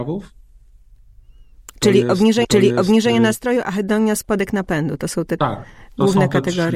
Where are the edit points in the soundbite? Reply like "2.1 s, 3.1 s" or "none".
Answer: 2.4 s, 5.4 s